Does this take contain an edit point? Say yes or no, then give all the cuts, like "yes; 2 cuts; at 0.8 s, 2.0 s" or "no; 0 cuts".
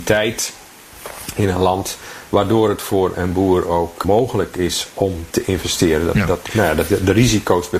yes; 1 cut; at 3.1 s